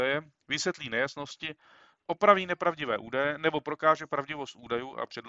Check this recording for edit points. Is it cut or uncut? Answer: uncut